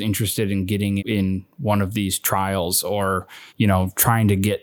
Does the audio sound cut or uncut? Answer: cut